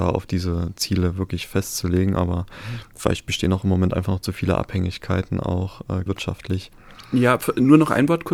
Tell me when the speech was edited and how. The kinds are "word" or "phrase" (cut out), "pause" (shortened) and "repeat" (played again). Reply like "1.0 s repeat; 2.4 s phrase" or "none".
6.1 s word